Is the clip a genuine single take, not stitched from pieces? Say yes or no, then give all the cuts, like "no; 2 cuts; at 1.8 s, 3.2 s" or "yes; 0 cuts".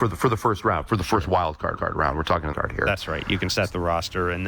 no; 2 cuts; at 1.8 s, 2.5 s